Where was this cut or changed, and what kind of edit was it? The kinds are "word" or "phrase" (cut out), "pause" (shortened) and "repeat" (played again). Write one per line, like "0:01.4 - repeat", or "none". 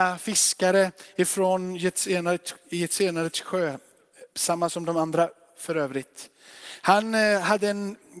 none